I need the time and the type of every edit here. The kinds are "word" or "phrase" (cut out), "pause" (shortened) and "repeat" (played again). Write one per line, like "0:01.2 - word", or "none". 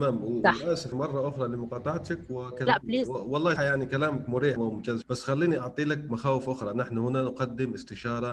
0:00.9 - word
0:02.7 - word
0:03.6 - word
0:04.6 - word
0:05.0 - word
0:05.6 - word